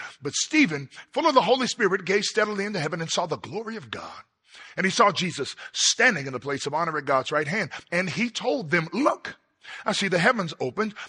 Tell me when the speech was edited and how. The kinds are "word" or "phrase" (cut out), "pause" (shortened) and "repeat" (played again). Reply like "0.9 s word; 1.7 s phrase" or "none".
none

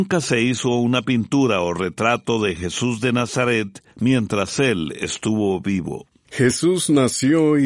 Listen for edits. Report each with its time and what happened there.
3.9 s pause

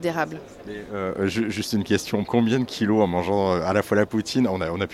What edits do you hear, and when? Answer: 2.2 s word

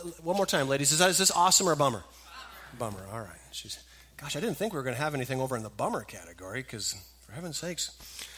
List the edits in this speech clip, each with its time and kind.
none

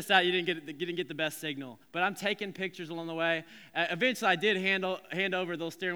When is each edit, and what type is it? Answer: 1.8 s pause

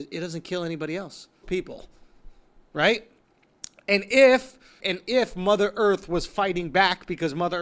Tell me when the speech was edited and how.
1.4 s phrase; 4.8 s phrase

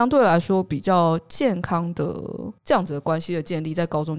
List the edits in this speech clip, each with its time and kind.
2.6 s pause

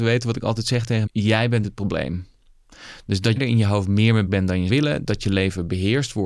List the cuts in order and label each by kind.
1.1 s word; 1.6 s word; 3.4 s word; 4.3 s word; 4.7 s word

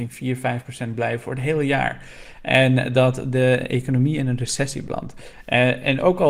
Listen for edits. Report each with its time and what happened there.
none

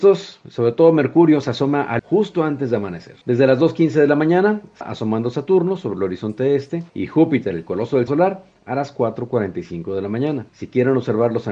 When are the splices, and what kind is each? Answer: 2.0 s word; 3.2 s pause; 4.8 s word; 6.9 s pause; 8.1 s word; 10.5 s pause

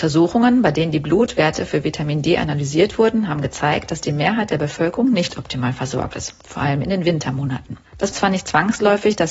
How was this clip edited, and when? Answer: 8.1 s word

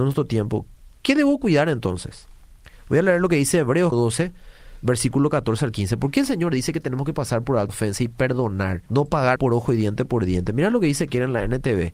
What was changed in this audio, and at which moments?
3.9 s word; 7.7 s word; 8.9 s pause; 9.4 s word

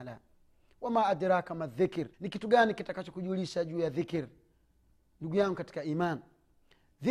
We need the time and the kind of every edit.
2.1 s pause

